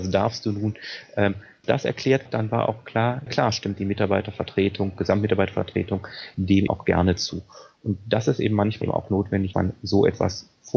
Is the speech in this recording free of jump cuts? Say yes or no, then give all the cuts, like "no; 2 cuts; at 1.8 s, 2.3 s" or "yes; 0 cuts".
no; 6 cuts; at 1.6 s, 2.3 s, 3.3 s, 6.7 s, 8.8 s, 9.5 s